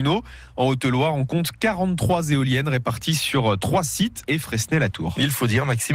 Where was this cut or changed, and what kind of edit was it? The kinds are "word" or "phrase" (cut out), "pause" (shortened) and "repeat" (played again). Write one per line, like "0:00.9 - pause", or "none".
0:04.2 - phrase